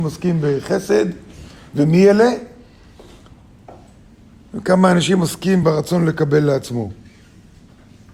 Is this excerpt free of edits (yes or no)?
yes